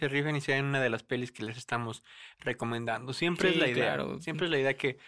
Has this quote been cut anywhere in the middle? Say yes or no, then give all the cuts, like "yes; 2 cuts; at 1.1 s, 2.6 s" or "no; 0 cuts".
no; 0 cuts